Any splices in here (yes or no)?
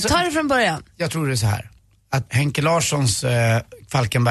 yes